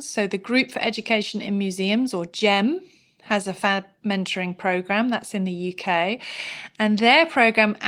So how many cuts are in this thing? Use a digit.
0